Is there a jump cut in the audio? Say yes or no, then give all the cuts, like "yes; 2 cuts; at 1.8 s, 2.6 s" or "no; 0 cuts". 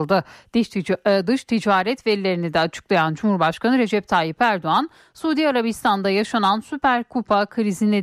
no; 0 cuts